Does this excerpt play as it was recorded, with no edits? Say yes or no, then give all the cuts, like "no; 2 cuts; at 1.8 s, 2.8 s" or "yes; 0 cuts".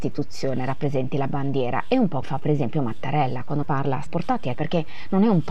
no; 4 cuts; at 2.2 s, 3.6 s, 4.1 s, 4.5 s